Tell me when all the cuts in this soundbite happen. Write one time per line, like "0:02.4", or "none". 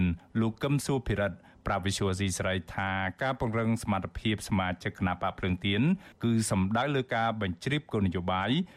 none

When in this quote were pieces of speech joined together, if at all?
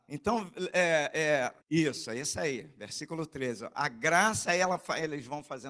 0:01.6

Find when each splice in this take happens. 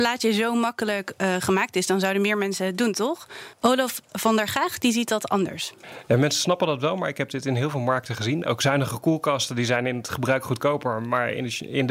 0:03.5

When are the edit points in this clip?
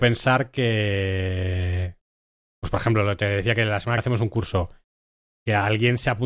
0:04.0

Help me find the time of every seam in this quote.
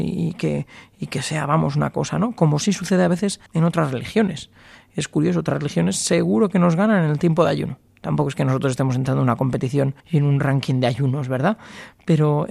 0:03.5
0:10.0

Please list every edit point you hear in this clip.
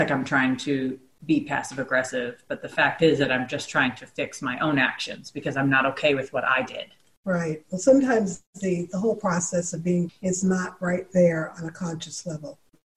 0:10.1

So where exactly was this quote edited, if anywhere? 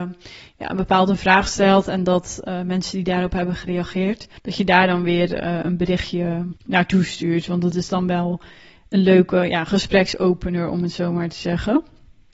0:04.4
0:06.6

